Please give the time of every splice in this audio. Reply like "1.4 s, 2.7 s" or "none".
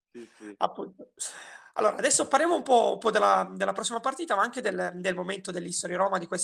none

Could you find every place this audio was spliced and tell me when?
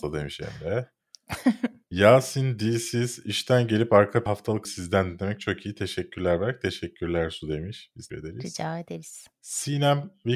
4.3 s, 4.6 s, 8.1 s

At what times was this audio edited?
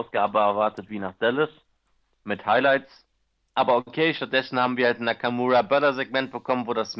none

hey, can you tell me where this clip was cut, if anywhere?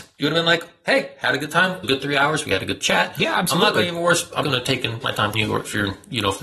1.8 s, 4.4 s, 5.0 s, 5.3 s

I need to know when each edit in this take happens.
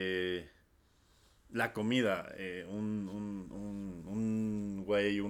none

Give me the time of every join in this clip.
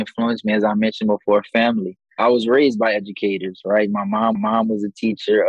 4.3 s

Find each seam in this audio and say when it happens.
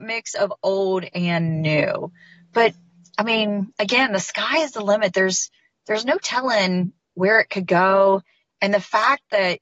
none

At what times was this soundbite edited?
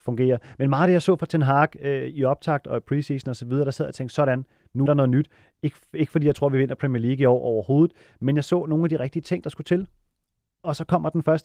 4.9 s

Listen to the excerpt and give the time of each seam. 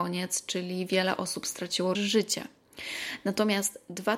1.9 s

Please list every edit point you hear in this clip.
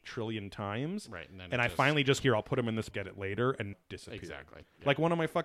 2.2 s, 2.9 s, 3.7 s

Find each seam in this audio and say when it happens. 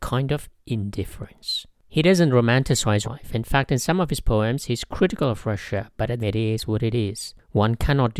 3.0 s, 6.2 s

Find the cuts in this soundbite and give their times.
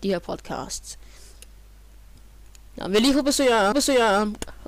3.7 s

